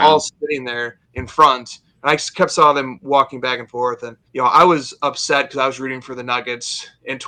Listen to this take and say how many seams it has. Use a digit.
2